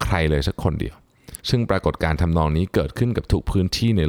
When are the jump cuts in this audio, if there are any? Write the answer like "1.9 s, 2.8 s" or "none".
1.4 s